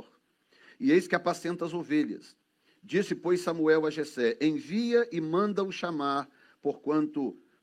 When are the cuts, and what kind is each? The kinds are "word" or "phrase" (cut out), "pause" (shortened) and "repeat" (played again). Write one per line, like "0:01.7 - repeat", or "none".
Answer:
none